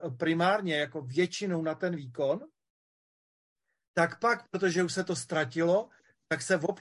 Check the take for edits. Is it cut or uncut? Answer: uncut